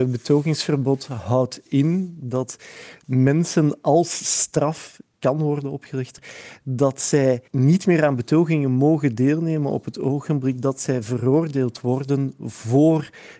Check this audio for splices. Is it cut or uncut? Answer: cut